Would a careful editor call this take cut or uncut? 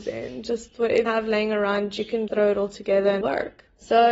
cut